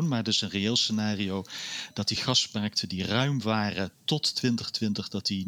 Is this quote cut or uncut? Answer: uncut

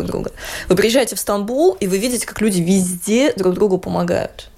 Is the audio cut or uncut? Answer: uncut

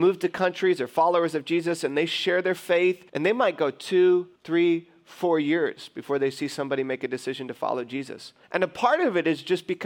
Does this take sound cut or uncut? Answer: cut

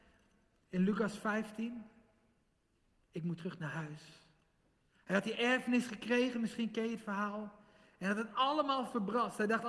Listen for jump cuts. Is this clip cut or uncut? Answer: uncut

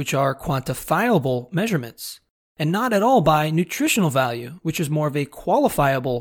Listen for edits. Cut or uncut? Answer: uncut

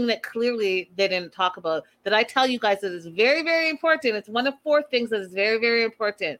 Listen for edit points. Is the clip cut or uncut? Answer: uncut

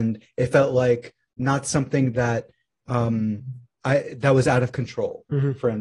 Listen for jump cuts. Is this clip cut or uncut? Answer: uncut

